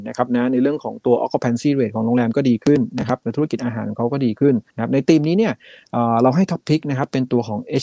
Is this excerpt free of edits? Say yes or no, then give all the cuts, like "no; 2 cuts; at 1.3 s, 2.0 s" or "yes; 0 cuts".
no; 1 cut; at 4.7 s